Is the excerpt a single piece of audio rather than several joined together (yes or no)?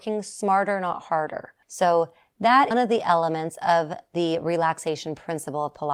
no